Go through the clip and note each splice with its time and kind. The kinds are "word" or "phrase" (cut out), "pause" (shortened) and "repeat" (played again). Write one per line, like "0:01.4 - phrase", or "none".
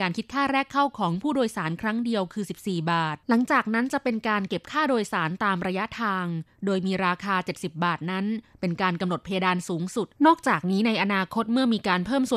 0:03.2 - pause
0:10.2 - pause